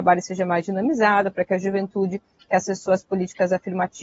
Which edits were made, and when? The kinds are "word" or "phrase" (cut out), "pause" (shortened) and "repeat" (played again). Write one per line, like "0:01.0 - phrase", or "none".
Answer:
none